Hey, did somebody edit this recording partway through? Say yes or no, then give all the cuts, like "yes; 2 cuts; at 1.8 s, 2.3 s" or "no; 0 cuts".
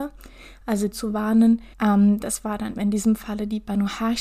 yes; 3 cuts; at 0.9 s, 1.7 s, 2.8 s